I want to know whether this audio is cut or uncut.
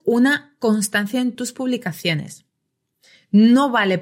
uncut